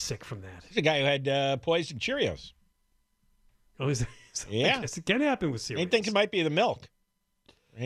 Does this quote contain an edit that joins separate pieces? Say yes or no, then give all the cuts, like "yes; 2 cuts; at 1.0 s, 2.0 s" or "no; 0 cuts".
no; 0 cuts